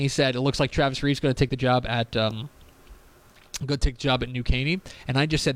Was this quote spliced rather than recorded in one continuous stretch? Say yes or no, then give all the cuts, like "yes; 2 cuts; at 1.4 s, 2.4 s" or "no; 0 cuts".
no; 0 cuts